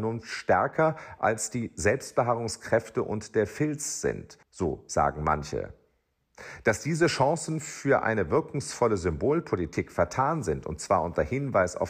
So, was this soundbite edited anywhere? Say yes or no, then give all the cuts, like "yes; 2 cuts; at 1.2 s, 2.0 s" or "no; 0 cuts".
yes; 1 cut; at 4.4 s